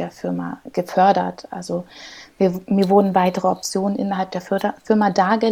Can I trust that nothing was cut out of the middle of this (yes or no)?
yes